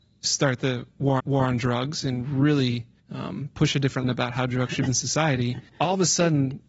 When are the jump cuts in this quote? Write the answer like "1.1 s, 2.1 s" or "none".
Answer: 1.2 s, 3.0 s, 4.0 s, 4.9 s, 5.7 s